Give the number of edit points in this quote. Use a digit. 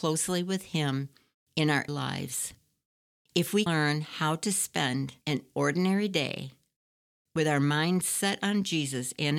3